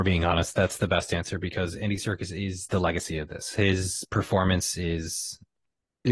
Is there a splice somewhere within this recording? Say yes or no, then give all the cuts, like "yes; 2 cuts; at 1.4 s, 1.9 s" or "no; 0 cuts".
no; 0 cuts